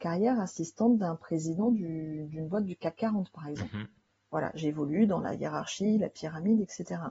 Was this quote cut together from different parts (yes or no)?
no